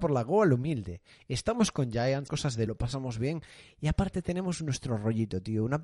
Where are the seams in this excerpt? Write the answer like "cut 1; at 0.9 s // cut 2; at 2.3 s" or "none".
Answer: cut 1; at 2.3 s // cut 2; at 2.7 s